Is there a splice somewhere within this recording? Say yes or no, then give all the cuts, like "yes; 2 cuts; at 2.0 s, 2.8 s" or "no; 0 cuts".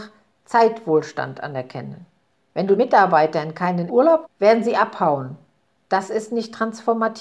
yes; 3 cuts; at 2.8 s, 3.9 s, 4.3 s